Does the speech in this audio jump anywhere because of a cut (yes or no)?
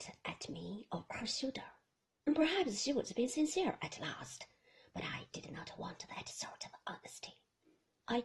yes